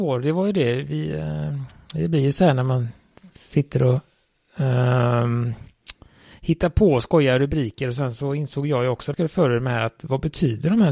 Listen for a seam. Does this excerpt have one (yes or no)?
yes